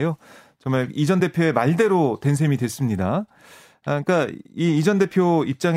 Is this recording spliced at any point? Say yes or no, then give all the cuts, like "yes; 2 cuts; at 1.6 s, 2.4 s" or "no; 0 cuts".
no; 0 cuts